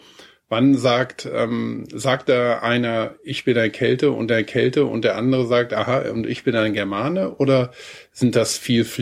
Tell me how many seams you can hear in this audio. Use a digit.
1